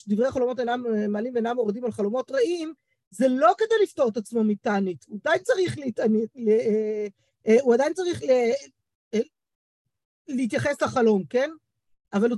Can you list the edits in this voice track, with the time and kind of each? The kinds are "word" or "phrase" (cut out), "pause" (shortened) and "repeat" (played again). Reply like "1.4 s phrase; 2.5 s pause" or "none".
none